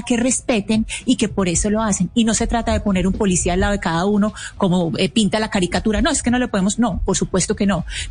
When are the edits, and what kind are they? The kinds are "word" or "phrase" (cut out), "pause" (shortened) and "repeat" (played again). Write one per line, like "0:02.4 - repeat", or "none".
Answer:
none